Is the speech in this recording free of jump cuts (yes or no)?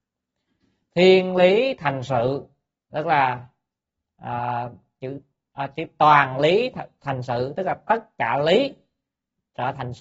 yes